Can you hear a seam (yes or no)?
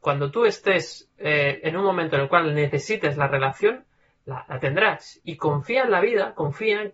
no